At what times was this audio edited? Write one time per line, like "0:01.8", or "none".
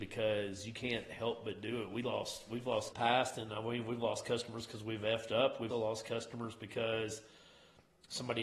0:02.9
0:05.7